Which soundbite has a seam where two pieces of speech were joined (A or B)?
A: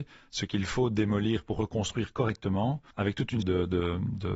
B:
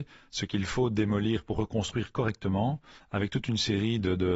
A